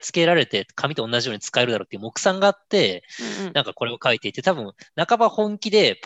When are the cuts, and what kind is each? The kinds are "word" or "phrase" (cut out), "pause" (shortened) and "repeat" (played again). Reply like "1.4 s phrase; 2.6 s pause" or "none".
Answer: none

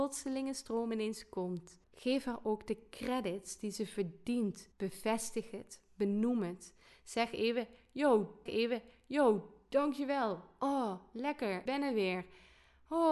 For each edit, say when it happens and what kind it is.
1.8 s pause; 4.7 s pause; 8.5 s repeat; 11.7 s word

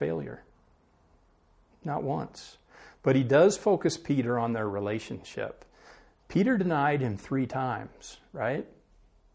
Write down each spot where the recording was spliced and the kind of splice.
none

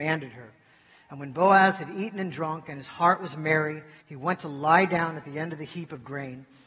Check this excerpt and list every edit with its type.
4.0 s pause

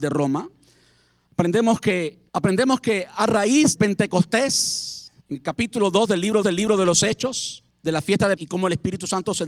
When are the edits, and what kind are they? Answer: 2.3 s pause; 3.8 s word; 5.2 s pause; 6.4 s repeat; 7.7 s pause; 8.4 s word

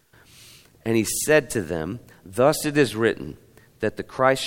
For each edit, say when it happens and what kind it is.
none

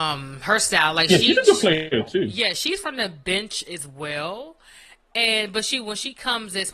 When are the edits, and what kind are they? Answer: none

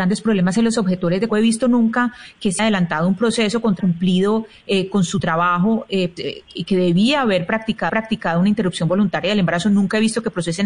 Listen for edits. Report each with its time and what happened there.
1.3 s phrase; 2.6 s word; 3.8 s phrase; 6.2 s word; 6.5 s phrase; 7.9 s repeat

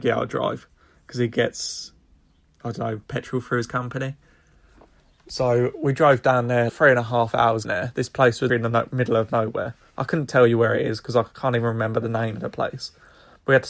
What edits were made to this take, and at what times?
6.7 s word; 7.6 s word; 8.5 s word

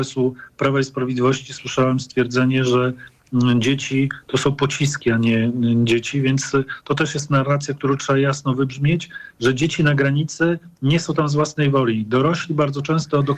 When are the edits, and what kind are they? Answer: none

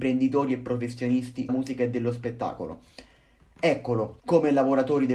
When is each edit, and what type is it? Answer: 1.5 s word; 4.2 s pause

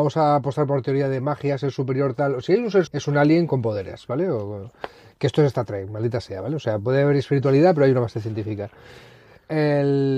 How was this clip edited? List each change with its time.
2.9 s word

